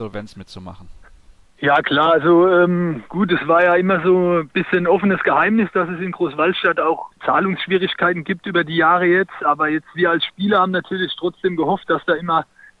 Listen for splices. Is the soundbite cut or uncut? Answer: uncut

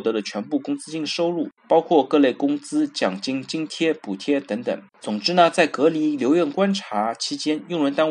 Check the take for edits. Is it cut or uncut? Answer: cut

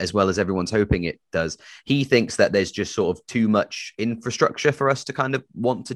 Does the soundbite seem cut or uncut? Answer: uncut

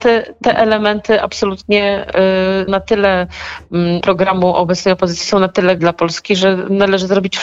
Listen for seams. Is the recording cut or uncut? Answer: cut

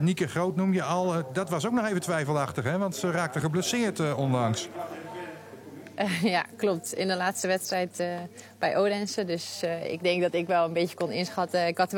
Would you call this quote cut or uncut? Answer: uncut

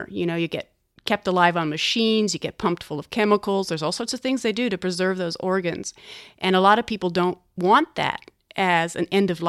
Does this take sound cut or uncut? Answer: uncut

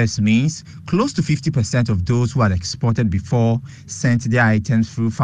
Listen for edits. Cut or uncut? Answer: uncut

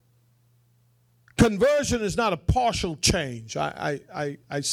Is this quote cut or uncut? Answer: uncut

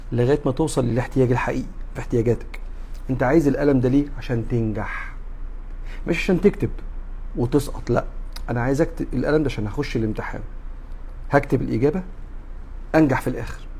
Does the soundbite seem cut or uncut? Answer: cut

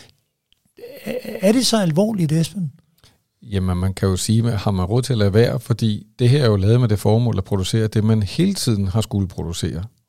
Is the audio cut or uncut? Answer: uncut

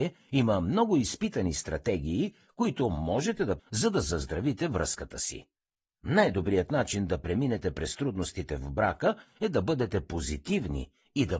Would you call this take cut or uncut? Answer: cut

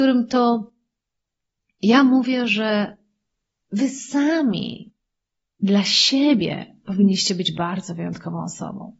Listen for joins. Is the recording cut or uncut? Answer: uncut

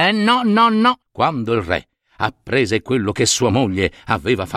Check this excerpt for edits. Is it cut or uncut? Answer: cut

